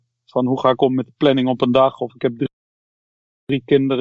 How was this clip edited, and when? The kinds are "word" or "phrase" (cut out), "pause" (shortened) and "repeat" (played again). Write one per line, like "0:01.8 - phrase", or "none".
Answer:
0:02.9 - pause